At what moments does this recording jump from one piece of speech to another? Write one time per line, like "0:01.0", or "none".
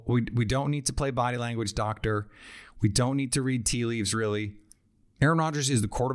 none